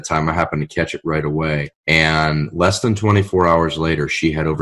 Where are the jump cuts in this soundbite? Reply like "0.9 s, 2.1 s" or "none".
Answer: 1.7 s